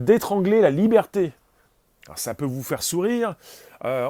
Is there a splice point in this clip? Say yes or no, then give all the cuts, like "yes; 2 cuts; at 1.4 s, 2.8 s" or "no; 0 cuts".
no; 0 cuts